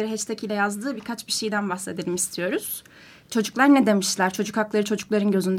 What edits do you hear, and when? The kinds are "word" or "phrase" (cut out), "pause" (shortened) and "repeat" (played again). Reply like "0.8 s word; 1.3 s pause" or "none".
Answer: none